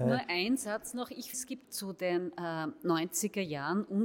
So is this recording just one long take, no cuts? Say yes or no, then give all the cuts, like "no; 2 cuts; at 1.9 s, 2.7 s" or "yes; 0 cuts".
no; 2 cuts; at 1.3 s, 1.6 s